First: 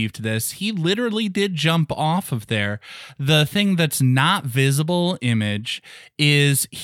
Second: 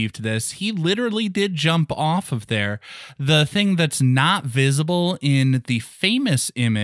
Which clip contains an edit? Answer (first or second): first